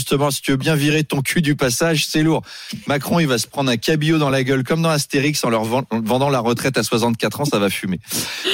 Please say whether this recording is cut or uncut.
uncut